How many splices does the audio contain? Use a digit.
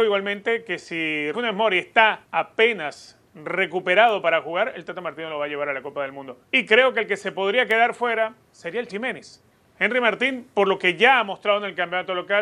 6